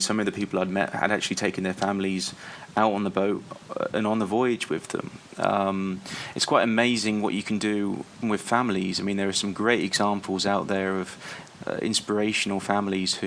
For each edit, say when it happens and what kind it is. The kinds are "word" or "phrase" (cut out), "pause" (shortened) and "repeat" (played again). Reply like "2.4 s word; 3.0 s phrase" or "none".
8.2 s word